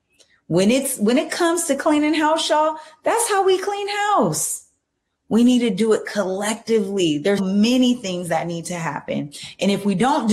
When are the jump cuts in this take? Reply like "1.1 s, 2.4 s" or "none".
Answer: 7.4 s